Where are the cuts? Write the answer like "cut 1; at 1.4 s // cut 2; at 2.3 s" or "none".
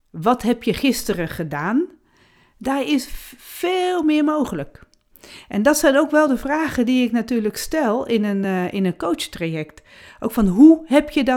none